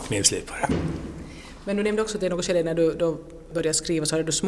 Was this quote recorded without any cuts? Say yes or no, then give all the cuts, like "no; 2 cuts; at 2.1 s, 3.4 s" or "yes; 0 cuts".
yes; 0 cuts